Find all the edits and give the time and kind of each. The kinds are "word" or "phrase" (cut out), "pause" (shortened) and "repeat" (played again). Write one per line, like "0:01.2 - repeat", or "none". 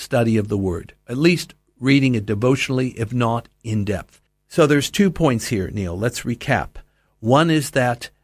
0:04.3 - pause